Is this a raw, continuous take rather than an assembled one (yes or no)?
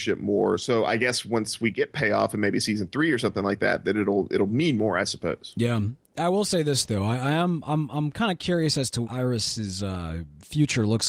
no